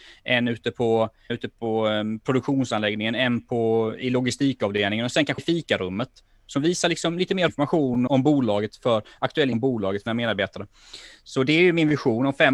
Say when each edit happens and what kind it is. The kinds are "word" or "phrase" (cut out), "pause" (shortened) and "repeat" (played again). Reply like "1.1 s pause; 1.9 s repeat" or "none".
1.3 s word; 5.4 s word; 7.5 s word; 8.1 s word; 9.5 s word; 10.1 s word